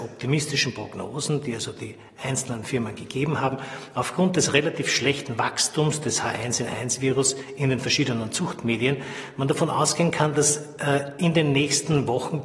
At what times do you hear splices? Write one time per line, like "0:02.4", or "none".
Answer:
none